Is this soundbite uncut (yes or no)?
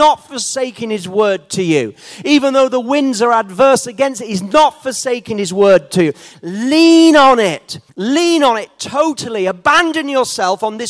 no